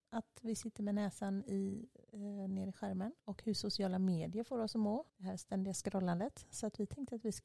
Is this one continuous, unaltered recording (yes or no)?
no